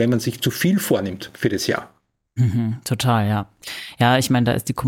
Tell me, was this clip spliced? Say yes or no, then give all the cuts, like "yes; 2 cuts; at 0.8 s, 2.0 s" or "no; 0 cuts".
no; 0 cuts